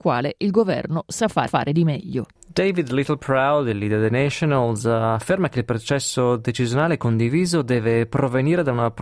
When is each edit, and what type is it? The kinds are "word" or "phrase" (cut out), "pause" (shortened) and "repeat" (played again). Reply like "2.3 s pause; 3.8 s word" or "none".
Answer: 1.5 s repeat; 2.4 s pause